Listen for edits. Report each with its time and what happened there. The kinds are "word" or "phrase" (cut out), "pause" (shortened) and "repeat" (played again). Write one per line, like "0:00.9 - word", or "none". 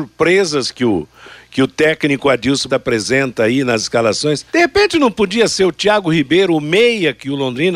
0:02.7 - word
0:04.5 - pause